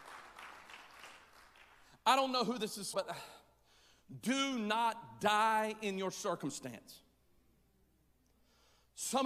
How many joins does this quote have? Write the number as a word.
one